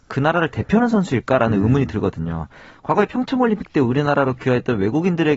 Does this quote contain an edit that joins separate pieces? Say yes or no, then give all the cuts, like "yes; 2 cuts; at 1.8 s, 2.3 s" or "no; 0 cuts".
no; 0 cuts